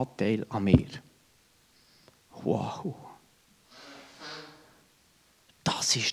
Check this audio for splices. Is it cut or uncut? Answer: uncut